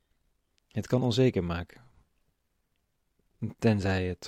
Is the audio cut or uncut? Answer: uncut